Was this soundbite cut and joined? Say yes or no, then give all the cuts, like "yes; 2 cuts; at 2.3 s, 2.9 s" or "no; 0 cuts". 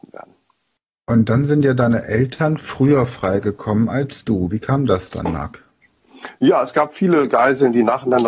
no; 0 cuts